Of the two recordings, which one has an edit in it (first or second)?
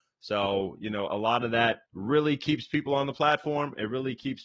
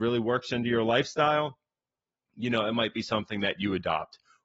first